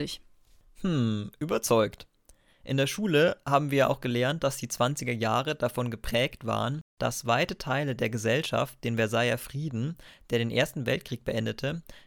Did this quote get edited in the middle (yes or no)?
no